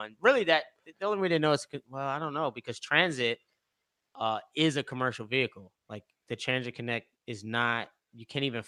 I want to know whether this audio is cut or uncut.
uncut